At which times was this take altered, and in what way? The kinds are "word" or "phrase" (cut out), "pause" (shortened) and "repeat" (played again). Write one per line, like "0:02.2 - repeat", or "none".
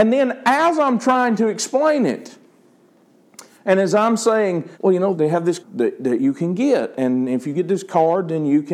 0:04.7 - pause
0:05.1 - word
0:05.6 - word